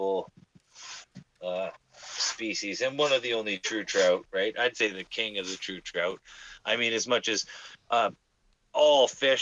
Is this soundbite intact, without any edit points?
yes; 0 cuts

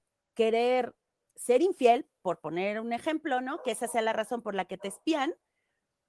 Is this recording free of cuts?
yes; 0 cuts

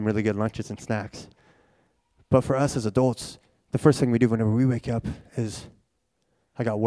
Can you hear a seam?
no; 0 cuts

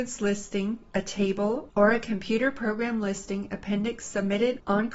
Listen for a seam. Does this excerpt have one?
no; 0 cuts

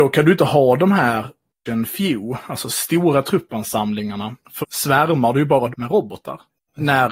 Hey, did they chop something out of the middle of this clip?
yes; 3 cuts; at 1.7 s, 4.6 s, 5.7 s

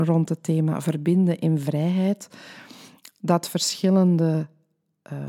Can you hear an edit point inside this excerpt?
no; 0 cuts

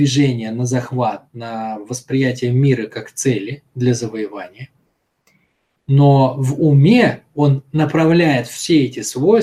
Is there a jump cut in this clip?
no; 0 cuts

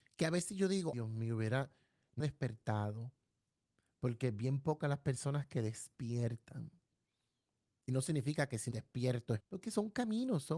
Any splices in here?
yes; 4 cuts; at 0.9 s, 2.2 s, 8.7 s, 9.4 s

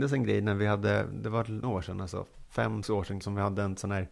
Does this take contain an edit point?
yes; 3 cuts; at 1.6 s, 2.8 s, 3.2 s

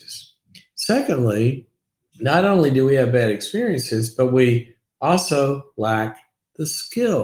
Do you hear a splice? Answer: no; 0 cuts

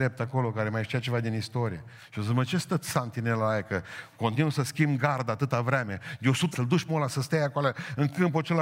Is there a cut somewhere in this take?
yes; 2 cuts; at 6.5 s, 6.9 s

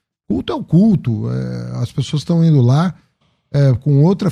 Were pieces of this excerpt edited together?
no; 0 cuts

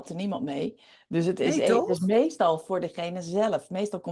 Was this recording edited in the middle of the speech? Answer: no; 0 cuts

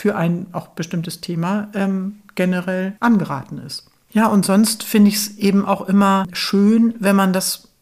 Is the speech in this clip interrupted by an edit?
yes; 1 cut; at 3.0 s

